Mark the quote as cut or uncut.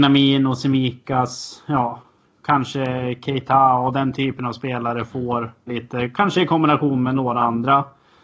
cut